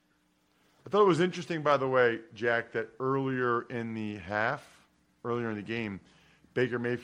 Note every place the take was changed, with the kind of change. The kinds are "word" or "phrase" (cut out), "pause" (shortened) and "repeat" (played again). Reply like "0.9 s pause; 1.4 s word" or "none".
none

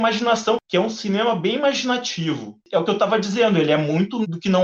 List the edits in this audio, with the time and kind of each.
2.6 s pause

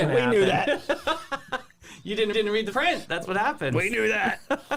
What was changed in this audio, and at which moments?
2.3 s repeat; 2.7 s word

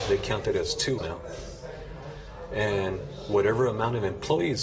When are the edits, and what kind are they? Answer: 1.0 s word

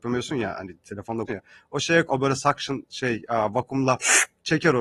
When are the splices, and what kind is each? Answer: 1.3 s word; 2.1 s word

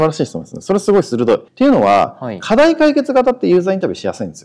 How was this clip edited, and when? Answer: 1.5 s pause

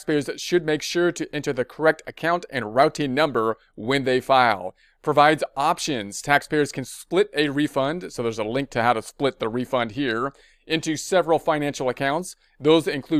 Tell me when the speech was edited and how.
none

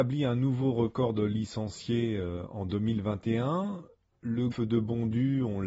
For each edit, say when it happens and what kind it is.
4.5 s word

